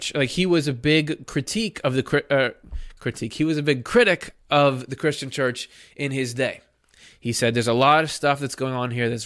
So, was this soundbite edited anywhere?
no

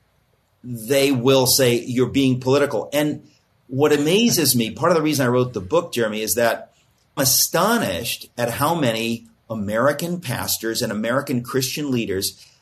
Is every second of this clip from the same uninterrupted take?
no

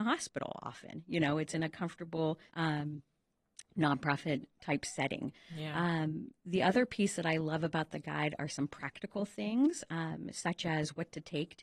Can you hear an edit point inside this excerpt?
yes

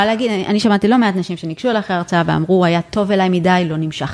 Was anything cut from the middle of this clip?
no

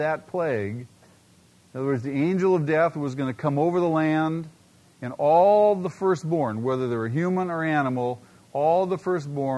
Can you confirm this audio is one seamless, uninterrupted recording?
yes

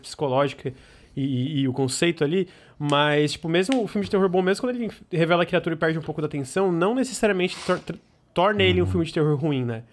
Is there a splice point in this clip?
no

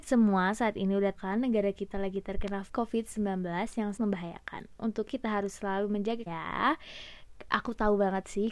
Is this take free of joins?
no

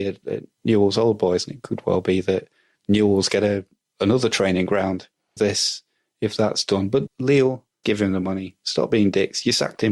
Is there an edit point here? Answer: yes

